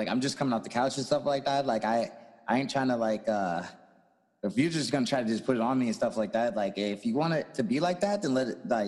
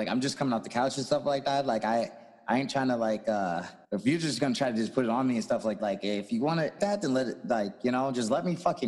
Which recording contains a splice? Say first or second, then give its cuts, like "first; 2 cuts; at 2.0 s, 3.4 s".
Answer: second; 3 cuts; at 3.8 s, 5.8 s, 6.8 s